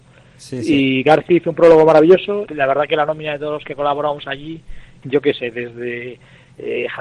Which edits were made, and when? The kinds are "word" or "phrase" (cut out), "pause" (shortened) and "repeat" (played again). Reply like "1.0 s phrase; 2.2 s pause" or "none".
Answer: 2.4 s word; 5.0 s word